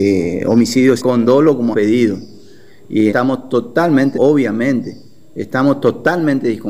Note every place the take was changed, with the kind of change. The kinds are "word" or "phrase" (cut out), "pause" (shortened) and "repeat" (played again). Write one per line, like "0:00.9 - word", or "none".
0:01.0 - word
0:01.7 - word
0:03.1 - word
0:04.1 - word